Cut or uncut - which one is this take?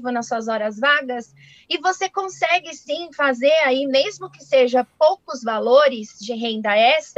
uncut